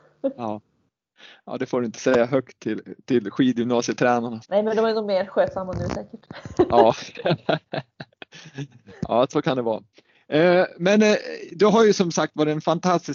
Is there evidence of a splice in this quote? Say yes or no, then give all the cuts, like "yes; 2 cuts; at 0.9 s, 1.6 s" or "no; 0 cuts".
yes; 1 cut; at 4.4 s